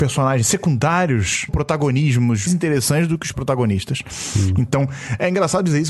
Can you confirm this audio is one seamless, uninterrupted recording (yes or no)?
no